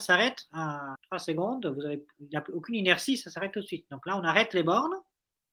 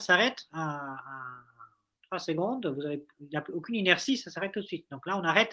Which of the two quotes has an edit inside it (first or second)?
first